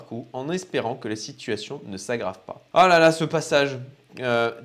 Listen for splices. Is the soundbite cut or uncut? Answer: uncut